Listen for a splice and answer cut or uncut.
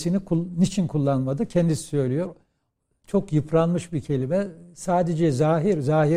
uncut